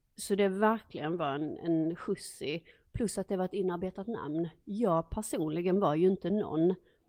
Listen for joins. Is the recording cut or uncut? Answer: uncut